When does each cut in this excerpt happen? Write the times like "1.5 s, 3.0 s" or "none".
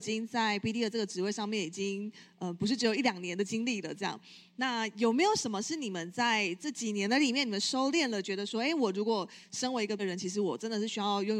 10.0 s